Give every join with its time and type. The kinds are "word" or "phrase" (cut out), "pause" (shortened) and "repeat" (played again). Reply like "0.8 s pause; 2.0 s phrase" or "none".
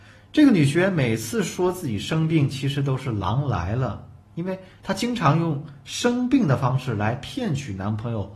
none